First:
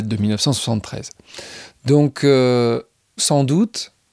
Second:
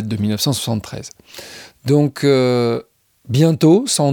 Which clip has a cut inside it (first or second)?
first